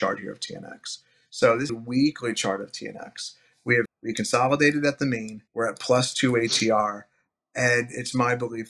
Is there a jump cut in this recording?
yes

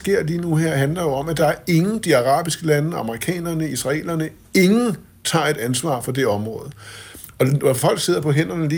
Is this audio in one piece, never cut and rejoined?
yes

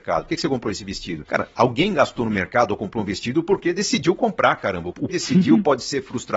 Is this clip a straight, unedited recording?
no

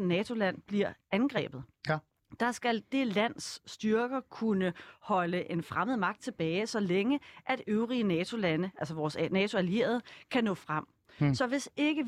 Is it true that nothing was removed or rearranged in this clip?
yes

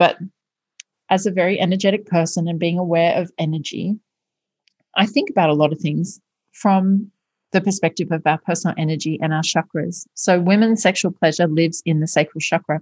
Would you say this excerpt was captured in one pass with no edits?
yes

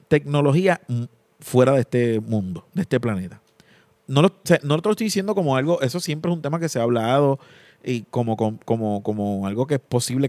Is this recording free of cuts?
yes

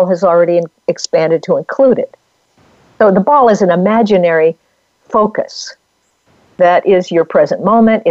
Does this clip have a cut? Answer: no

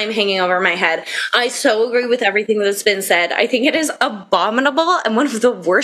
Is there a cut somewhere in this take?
no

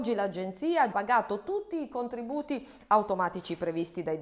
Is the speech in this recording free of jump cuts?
no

